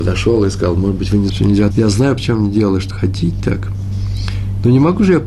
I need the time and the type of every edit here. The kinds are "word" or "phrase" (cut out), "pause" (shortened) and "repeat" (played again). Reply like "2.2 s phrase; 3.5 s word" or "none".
1.3 s word; 1.7 s phrase; 2.2 s word; 2.9 s word